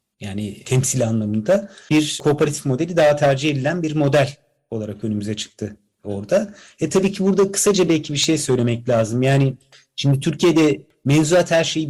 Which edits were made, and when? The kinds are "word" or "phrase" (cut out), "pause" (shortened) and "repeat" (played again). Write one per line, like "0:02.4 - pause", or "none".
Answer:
none

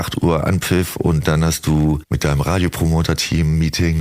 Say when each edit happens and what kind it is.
none

